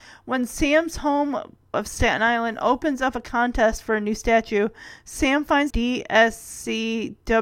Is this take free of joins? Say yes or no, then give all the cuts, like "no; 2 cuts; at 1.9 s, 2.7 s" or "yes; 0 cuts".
no; 2 cuts; at 1.7 s, 5.7 s